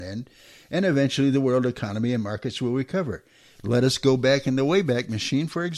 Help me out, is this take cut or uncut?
uncut